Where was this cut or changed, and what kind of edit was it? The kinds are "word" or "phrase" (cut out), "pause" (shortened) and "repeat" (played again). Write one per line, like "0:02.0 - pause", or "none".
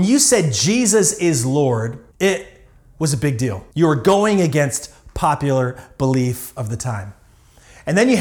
0:02.1 - pause
0:03.7 - pause